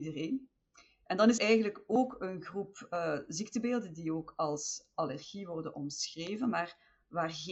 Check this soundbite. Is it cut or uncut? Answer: cut